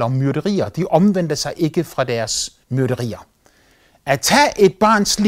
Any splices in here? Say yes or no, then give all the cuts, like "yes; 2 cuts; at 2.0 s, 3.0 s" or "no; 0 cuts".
yes; 1 cut; at 2.6 s